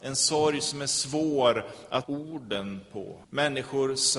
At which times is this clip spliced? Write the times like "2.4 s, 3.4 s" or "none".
2.0 s, 3.2 s